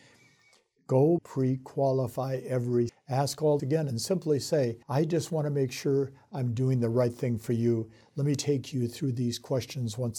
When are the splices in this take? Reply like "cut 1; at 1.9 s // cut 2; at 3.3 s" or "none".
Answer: cut 1; at 1.2 s // cut 2; at 2.9 s // cut 3; at 3.6 s // cut 4; at 4.8 s